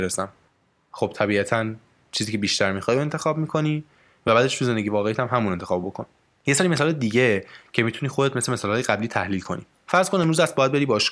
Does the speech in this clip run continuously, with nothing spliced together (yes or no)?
yes